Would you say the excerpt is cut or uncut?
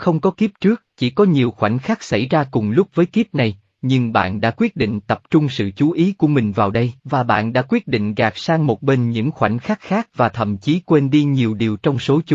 cut